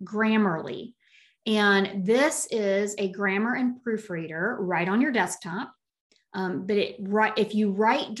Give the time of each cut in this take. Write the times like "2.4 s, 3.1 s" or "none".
none